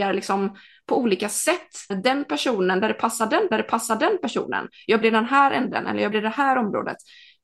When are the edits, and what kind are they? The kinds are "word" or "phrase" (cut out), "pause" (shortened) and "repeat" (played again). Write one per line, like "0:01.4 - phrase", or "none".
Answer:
0:01.9 - word
0:03.5 - repeat
0:05.0 - word
0:06.1 - word